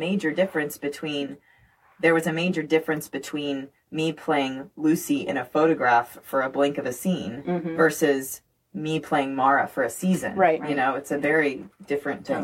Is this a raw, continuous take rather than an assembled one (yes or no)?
yes